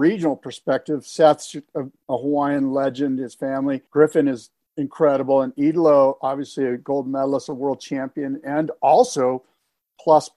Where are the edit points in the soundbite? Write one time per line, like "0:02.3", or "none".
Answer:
0:03.9